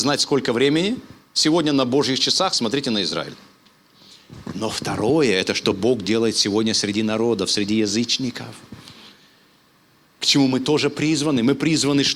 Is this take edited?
no; 0 cuts

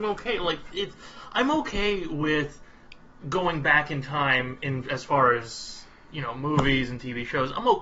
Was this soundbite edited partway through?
no; 0 cuts

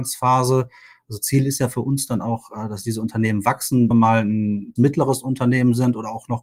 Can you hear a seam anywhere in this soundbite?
yes; 2 cuts; at 3.9 s, 4.8 s

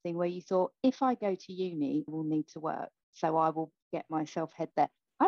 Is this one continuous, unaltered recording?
no; 2 cuts; at 2.1 s, 3.0 s

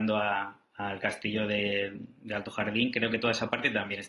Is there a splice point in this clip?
no; 0 cuts

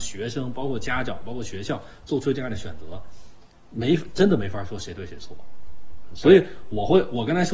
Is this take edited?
no; 0 cuts

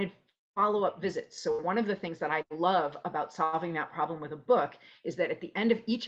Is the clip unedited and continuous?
yes; 0 cuts

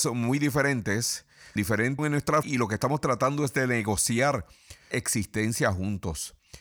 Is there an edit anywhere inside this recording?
yes; 4 cuts; at 1.6 s, 2.0 s, 2.4 s, 4.9 s

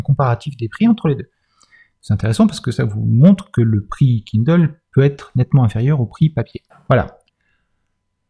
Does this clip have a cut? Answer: no; 0 cuts

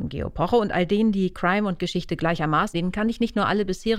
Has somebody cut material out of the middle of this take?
yes; 1 cut; at 2.7 s

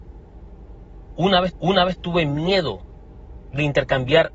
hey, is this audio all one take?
no; 1 cut; at 1.5 s

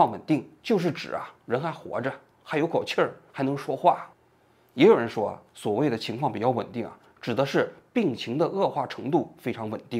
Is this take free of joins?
no; 1 cut; at 4.1 s

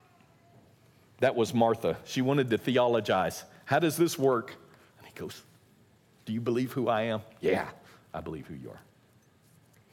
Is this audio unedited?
yes; 0 cuts

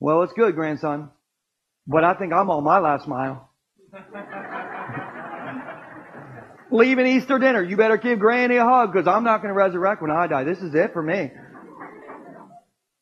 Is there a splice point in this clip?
no; 0 cuts

